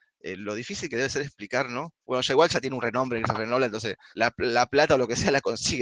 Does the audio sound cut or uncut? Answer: cut